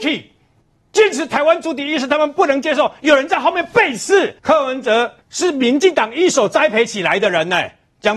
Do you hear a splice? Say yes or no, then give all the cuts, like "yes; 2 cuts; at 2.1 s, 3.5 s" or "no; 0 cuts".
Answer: yes; 2 cuts; at 4.4 s, 5.2 s